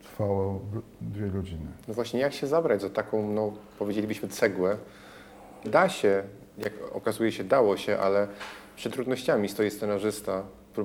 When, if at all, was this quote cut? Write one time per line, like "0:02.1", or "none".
0:05.6
0:08.9